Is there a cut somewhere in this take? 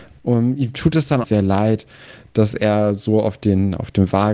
yes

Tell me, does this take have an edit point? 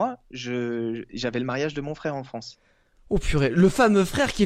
no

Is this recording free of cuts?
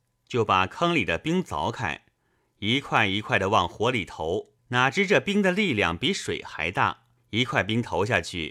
no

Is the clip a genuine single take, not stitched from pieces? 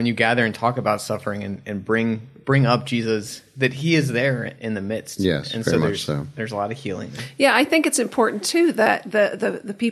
no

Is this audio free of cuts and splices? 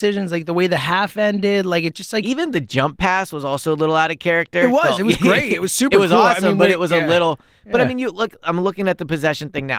yes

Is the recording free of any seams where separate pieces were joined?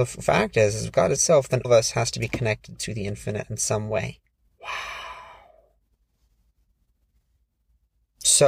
no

